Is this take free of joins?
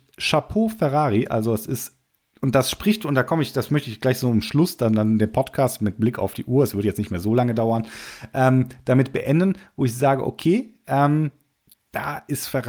yes; 0 cuts

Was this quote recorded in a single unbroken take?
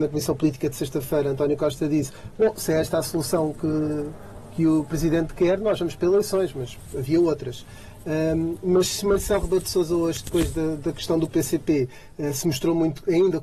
yes; 0 cuts

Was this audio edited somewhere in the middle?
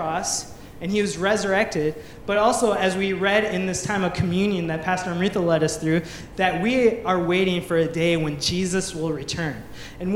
no; 0 cuts

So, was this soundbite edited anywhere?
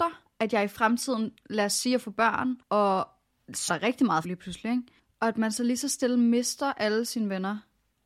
yes; 4 cuts; at 2.6 s, 3.7 s, 4.2 s, 5.0 s

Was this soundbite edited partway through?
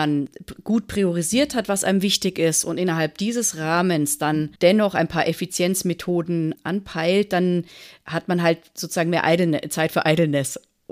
no; 0 cuts

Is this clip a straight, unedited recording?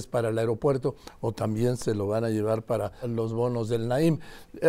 no; 1 cut; at 3.0 s

